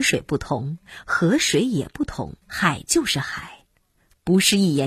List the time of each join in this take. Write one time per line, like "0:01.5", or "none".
0:02.4